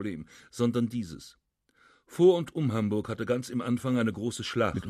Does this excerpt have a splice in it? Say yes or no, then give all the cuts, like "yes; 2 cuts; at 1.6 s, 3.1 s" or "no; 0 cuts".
no; 0 cuts